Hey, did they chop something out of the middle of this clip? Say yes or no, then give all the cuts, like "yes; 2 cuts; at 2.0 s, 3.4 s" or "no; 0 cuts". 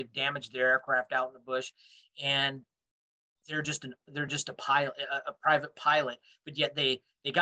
no; 0 cuts